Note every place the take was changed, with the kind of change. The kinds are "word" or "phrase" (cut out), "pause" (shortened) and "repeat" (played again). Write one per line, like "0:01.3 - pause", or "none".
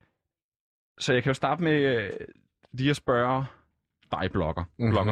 none